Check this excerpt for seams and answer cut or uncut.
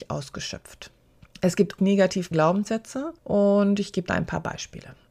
cut